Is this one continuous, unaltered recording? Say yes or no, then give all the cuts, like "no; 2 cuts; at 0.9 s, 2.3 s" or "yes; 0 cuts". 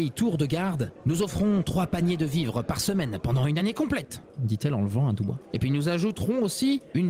yes; 0 cuts